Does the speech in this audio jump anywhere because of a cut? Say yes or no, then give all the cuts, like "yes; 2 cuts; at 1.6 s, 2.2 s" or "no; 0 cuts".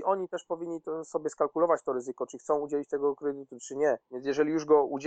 yes; 1 cut; at 4.0 s